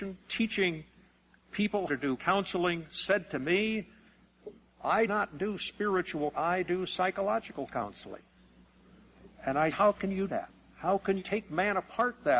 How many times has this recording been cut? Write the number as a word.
seven